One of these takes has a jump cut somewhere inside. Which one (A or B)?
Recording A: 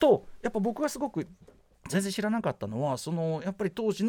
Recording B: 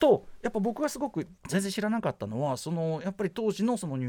B